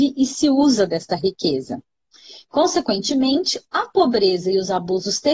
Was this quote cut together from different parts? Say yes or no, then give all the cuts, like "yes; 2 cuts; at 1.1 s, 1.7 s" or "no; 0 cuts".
no; 0 cuts